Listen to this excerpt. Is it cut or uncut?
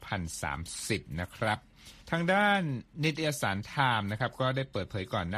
cut